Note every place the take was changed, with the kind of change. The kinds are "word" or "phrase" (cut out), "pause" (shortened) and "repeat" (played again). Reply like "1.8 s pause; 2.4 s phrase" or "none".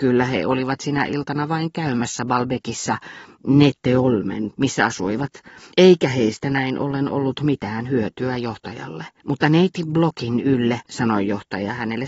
4.5 s word; 5.7 s pause; 9.2 s pause; 10.9 s pause